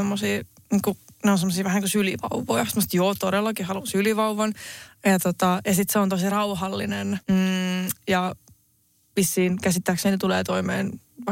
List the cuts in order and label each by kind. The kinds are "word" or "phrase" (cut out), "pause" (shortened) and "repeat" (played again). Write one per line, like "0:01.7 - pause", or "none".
0:07.2 - pause